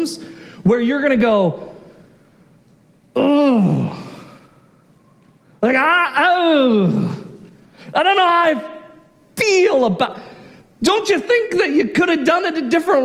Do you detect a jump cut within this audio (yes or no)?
no